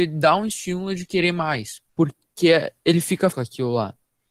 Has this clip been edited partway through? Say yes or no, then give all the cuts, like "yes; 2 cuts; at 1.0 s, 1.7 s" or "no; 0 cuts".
yes; 2 cuts; at 1.9 s, 3.3 s